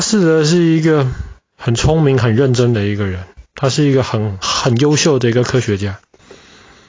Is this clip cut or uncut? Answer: cut